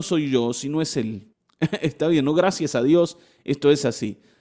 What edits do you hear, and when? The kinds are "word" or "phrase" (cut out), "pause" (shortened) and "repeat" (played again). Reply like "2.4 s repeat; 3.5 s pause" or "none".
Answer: 1.3 s pause